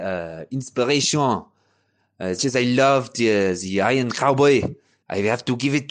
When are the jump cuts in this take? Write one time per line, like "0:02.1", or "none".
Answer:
0:02.4
0:05.0